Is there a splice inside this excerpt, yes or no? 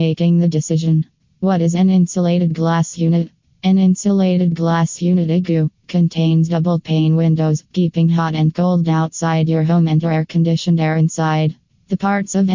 yes